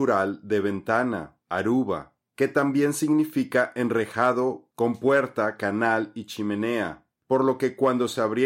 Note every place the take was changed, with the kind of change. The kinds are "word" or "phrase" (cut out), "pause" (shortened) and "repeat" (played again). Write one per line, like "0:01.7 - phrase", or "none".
none